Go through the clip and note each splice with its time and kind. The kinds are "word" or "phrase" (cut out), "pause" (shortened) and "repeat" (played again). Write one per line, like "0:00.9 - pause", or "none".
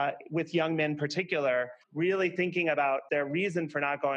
0:01.8 - pause
0:03.1 - word